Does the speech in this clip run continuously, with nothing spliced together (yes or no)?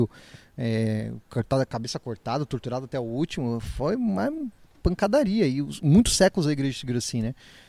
yes